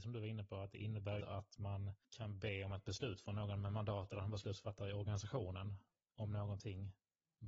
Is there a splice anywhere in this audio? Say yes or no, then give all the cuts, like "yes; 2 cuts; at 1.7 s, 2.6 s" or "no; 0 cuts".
yes; 2 cuts; at 1.2 s, 2.0 s